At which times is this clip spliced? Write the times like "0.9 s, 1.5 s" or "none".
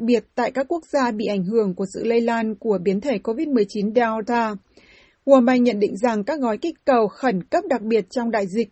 none